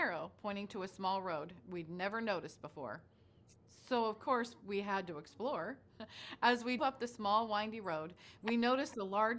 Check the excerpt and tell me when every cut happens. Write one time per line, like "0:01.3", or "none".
0:06.8